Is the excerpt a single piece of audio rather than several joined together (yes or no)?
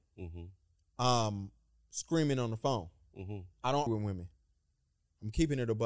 no